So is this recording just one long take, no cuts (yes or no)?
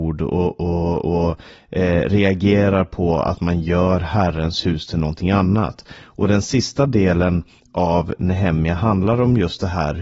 yes